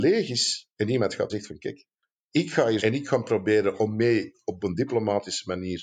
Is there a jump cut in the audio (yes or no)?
yes